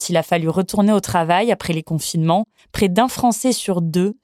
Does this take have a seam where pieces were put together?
yes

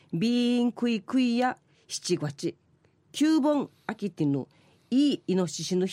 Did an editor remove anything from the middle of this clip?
no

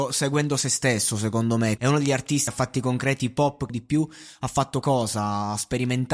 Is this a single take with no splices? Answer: no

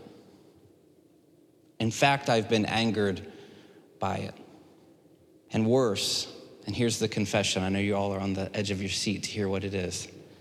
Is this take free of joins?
yes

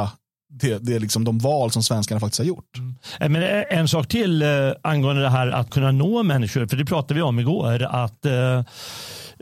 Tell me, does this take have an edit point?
yes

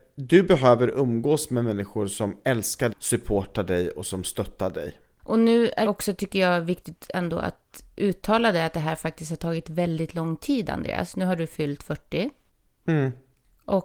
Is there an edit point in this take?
yes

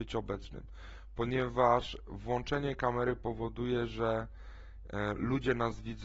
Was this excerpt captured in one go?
yes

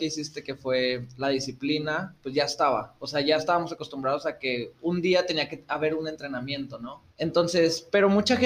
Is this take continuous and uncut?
no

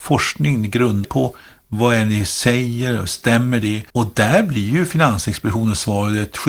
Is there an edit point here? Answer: yes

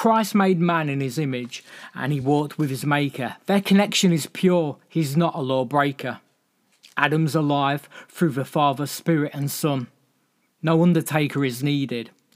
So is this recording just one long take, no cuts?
yes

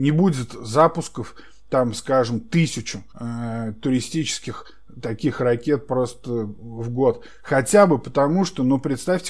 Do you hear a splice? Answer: yes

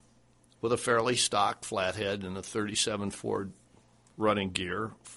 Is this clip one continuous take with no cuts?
yes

